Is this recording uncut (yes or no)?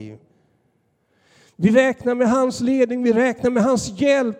yes